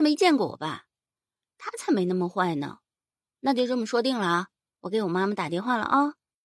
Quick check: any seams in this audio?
no; 0 cuts

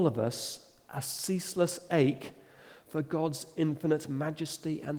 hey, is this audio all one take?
yes; 0 cuts

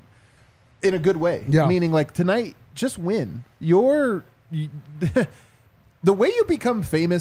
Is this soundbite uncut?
no; 1 cut; at 3.5 s

